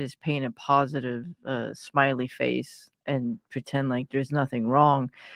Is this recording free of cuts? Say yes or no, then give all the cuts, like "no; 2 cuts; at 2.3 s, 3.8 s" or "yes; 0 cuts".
no; 1 cut; at 3.0 s